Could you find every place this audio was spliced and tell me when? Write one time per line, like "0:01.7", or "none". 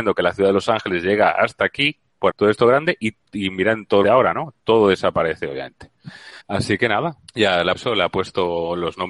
0:02.3
0:04.0
0:06.4
0:07.3
0:07.7